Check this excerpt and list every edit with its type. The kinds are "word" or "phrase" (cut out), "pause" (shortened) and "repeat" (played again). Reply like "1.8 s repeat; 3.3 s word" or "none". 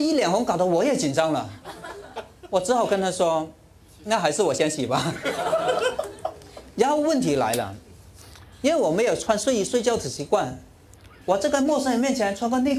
none